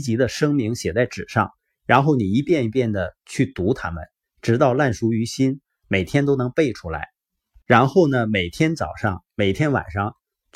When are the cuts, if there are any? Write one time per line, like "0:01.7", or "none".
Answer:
none